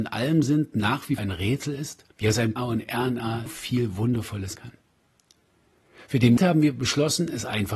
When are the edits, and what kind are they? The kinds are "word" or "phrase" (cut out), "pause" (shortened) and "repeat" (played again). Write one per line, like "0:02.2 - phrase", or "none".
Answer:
0:01.2 - word
0:02.1 - pause
0:02.6 - phrase
0:03.5 - word
0:04.5 - word
0:06.4 - word